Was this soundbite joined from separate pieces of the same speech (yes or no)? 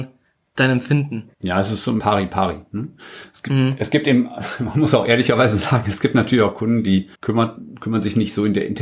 yes